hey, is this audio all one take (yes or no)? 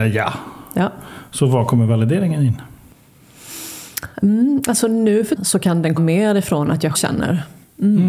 no